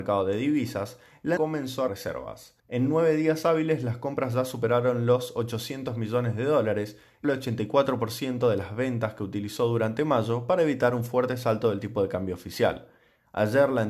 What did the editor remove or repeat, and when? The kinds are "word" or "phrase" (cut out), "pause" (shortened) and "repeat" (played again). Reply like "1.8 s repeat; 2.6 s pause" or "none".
1.4 s word; 1.9 s word; 2.6 s pause; 7.2 s word